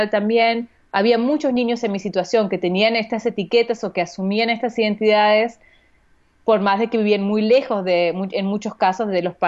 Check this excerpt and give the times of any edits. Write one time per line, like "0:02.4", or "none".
none